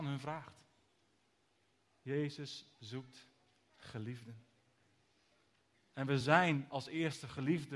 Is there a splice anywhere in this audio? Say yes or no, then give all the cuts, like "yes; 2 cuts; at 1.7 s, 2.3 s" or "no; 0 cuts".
no; 0 cuts